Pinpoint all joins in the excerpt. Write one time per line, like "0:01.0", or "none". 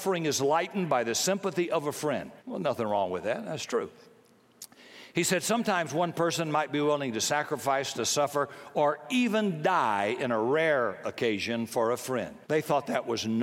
0:02.4
0:12.4

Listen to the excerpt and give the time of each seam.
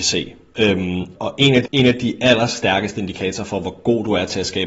0:01.2
0:01.7

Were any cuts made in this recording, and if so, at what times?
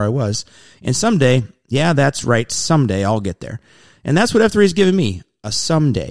none

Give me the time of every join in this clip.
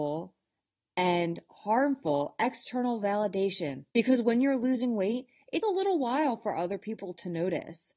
0:03.9
0:05.6

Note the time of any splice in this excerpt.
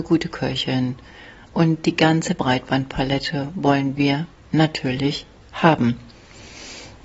none

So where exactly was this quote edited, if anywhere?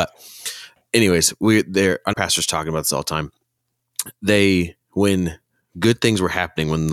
0:02.1

